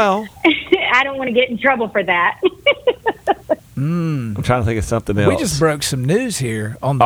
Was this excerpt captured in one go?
no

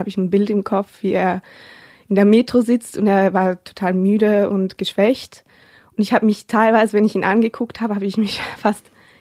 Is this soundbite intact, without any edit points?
yes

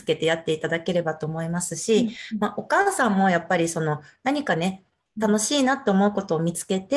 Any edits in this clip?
no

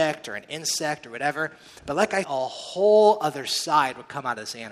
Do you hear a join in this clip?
yes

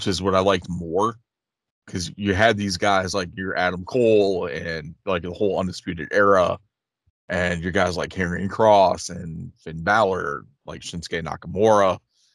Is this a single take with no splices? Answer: yes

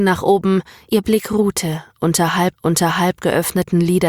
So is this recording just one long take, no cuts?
no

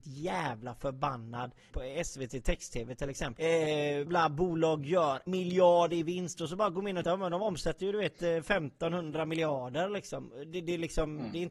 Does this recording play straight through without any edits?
no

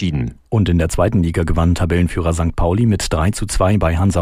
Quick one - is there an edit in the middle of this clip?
no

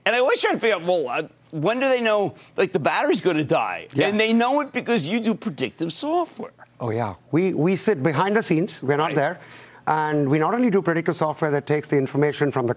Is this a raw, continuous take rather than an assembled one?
yes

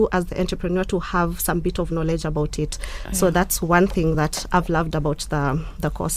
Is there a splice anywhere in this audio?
no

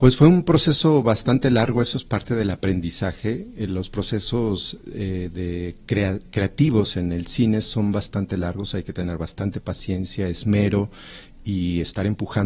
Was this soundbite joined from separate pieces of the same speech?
no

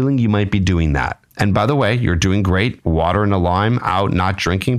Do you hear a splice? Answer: yes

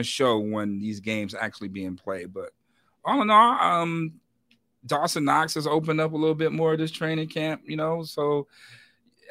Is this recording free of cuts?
yes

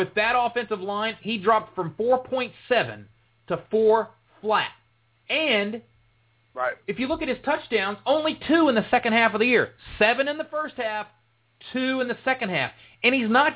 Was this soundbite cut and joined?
no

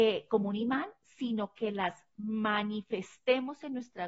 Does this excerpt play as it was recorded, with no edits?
yes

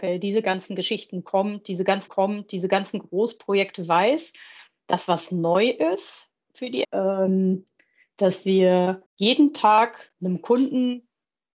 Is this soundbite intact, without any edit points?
no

